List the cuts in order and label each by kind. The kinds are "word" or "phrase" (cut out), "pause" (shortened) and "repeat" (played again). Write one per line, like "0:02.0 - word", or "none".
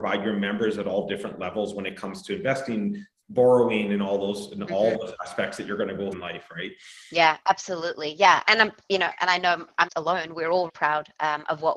0:06.1 - word
0:08.4 - word
0:09.9 - word
0:10.7 - word

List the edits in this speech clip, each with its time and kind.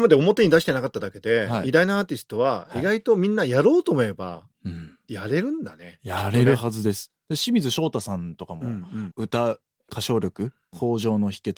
none

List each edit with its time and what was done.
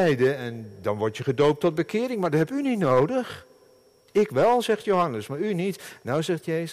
none

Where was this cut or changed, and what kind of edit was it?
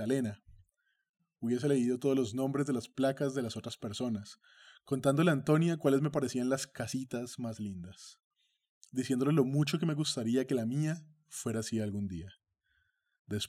none

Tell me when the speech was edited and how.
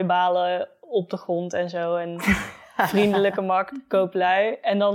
none

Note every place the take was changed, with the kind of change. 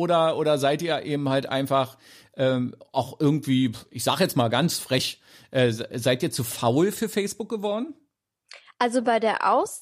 none

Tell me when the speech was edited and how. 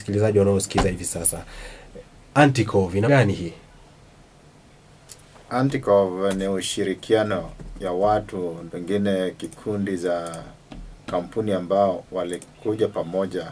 0:03.1 - word
0:08.7 - word

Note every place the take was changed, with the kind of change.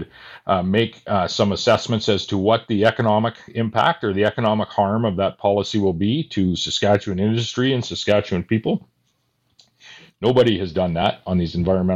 none

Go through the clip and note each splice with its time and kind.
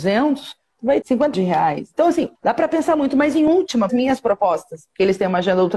0:01.0 - word
0:01.3 - word
0:02.3 - pause
0:03.9 - phrase

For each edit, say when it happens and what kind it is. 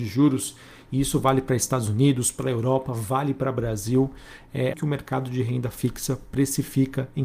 0:04.7 - word

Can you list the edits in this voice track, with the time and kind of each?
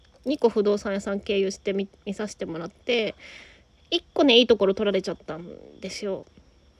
none

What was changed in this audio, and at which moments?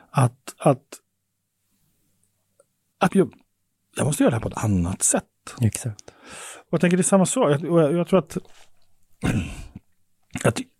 0:03.1 - word

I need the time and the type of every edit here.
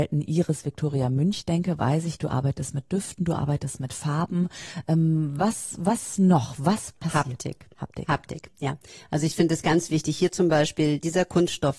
none

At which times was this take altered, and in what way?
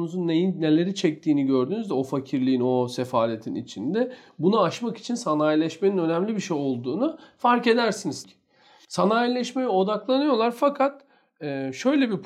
0:08.2 - word

